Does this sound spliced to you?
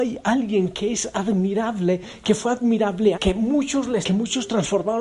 yes; 2 cuts; at 3.1 s, 4.0 s

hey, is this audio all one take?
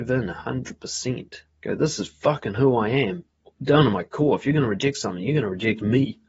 yes; 0 cuts

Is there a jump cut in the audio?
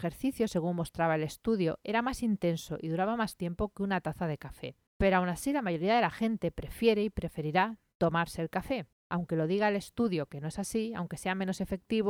yes; 2 cuts; at 4.9 s, 8.9 s

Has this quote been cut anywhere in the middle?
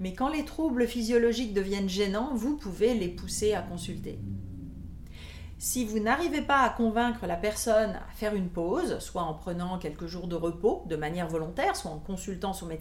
no; 0 cuts

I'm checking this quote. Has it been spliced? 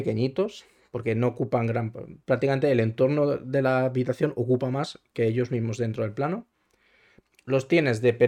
no; 0 cuts

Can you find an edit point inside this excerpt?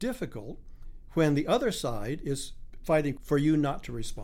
yes; 1 cut; at 3.2 s

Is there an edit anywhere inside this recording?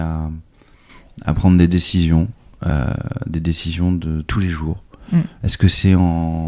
no; 0 cuts

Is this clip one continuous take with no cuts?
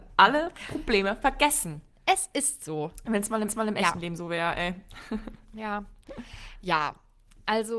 no; 2 cuts; at 1.9 s, 3.5 s

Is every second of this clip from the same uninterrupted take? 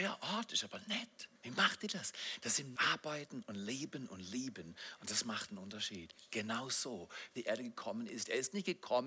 no; 3 cuts; at 1.4 s, 2.8 s, 7.4 s

